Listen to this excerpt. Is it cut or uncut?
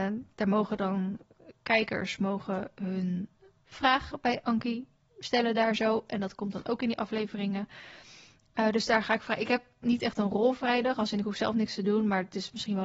cut